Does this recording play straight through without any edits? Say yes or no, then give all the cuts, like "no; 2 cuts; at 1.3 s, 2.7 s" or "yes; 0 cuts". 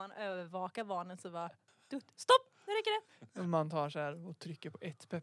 no; 1 cut; at 1.7 s